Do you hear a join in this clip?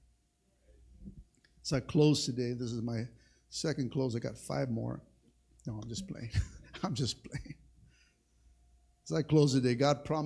no; 0 cuts

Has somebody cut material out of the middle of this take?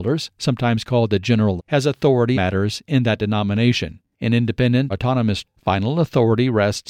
yes; 4 cuts; at 1.6 s, 2.3 s, 4.9 s, 5.4 s

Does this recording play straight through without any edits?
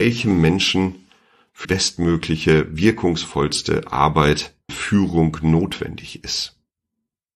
no; 2 cuts; at 1.6 s, 4.7 s

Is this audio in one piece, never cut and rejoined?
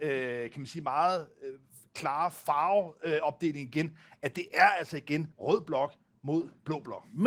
no; 1 cut; at 5.3 s

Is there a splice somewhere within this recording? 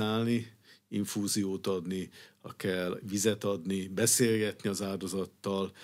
no; 0 cuts

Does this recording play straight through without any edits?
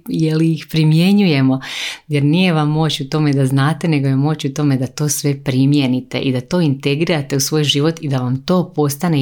yes; 0 cuts

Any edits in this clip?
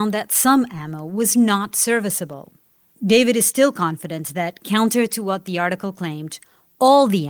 no; 0 cuts

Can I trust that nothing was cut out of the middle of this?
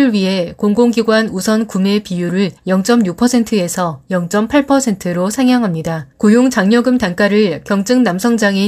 no; 2 cuts; at 2.6 s, 6.1 s

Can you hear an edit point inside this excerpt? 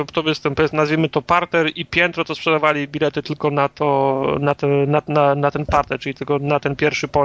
no; 0 cuts

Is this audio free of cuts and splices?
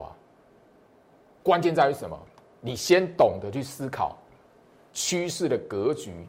yes; 0 cuts

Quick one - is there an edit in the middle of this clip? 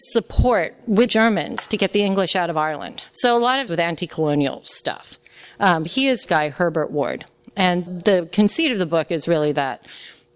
yes; 6 cuts; at 1.1 s, 3.1 s, 3.7 s, 5.9 s, 6.3 s, 7.9 s

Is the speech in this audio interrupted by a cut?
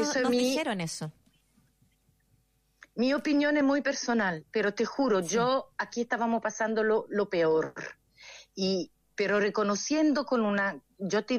no; 0 cuts

